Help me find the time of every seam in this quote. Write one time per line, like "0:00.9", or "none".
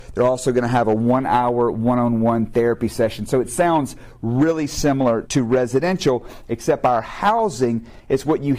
0:05.3